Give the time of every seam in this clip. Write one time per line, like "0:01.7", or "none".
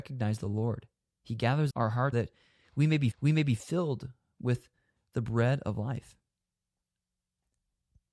0:00.9
0:01.7
0:02.1
0:03.1